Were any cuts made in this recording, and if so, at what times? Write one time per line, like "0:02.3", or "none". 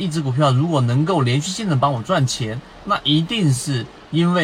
none